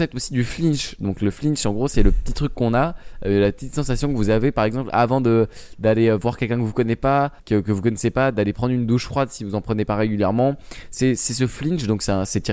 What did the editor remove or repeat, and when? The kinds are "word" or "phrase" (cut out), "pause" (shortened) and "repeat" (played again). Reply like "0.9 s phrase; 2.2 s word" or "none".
7.4 s pause